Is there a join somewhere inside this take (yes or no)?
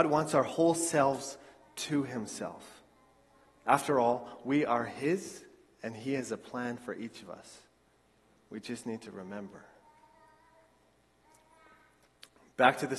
no